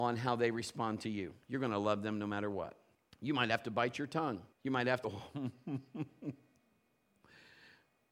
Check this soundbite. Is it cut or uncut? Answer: cut